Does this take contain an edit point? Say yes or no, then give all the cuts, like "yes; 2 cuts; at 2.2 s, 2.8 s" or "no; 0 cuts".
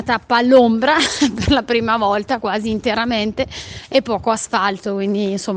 no; 0 cuts